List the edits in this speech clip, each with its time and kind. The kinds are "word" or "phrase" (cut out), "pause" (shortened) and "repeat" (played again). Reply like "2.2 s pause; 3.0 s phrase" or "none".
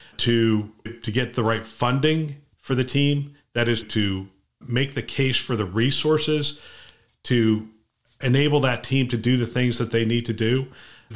none